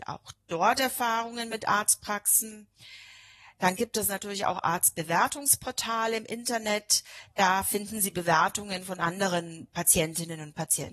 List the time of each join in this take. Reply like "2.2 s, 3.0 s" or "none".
none